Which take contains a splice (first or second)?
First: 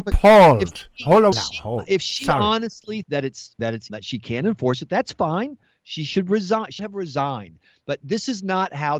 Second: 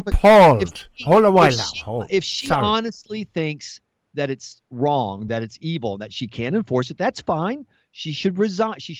first